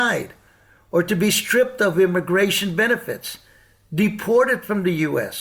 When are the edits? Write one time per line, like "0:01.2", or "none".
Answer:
none